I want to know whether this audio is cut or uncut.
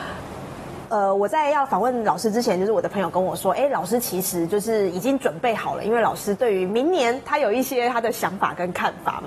uncut